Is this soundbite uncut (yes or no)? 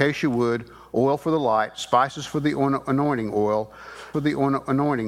no